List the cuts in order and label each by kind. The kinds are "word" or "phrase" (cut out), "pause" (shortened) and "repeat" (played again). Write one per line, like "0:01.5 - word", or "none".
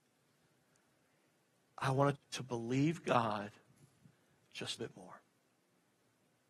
0:02.1 - phrase
0:04.8 - phrase